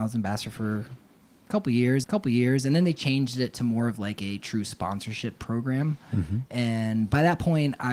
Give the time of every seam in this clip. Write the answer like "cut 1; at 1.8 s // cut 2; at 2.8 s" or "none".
cut 1; at 2.0 s // cut 2; at 5.4 s